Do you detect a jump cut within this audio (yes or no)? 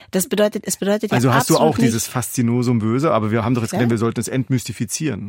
no